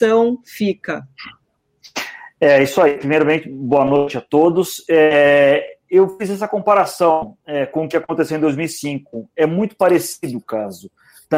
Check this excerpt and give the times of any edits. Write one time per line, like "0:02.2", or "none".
0:07.4